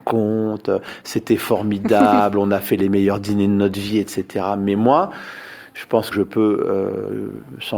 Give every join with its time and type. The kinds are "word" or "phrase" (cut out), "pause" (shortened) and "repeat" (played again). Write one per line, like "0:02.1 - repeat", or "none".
0:06.1 - phrase